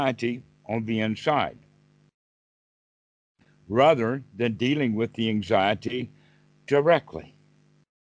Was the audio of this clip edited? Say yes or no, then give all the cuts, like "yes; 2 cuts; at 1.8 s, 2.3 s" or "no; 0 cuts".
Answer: no; 0 cuts